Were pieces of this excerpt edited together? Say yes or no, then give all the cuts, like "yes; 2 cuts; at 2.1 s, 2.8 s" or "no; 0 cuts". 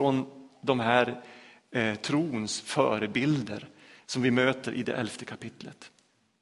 no; 0 cuts